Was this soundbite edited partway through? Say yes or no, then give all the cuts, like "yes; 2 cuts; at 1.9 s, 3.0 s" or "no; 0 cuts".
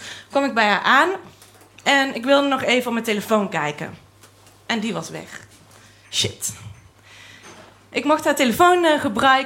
no; 0 cuts